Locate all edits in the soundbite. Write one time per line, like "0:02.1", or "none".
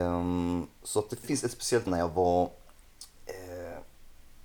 0:01.2
0:01.9